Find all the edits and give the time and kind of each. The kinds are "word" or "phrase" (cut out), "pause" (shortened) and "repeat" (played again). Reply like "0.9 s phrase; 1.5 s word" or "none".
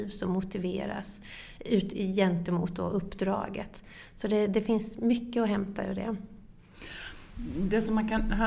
none